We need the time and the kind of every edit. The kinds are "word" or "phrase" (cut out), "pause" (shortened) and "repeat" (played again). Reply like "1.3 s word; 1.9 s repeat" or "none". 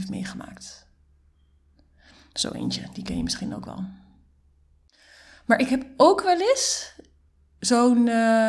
none